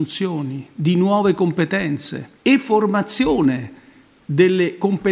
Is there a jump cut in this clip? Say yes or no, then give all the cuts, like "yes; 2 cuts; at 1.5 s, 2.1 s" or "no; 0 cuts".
yes; 1 cut; at 2.4 s